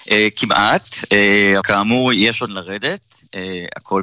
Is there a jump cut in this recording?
yes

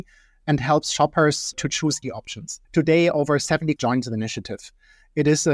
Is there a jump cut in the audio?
yes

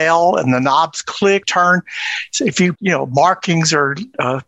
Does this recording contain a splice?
yes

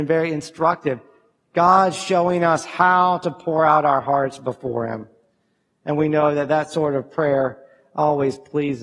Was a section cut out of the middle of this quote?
no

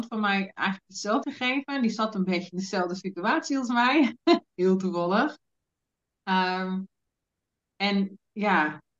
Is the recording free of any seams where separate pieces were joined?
no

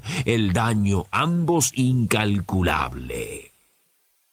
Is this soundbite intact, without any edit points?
no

